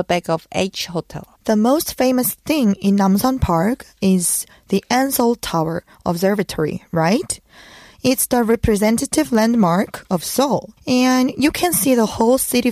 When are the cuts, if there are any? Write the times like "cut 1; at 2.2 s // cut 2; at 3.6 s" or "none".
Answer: cut 1; at 1.3 s // cut 2; at 10.8 s